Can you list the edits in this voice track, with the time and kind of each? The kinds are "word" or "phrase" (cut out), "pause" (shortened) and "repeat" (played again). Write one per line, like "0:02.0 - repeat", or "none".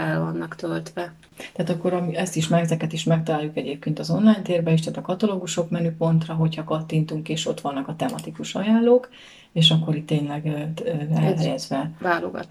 none